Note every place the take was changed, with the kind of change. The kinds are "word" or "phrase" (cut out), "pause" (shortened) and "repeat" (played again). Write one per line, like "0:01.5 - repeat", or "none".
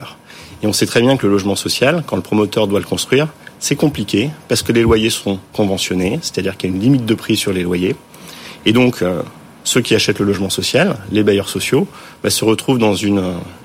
0:05.5 - pause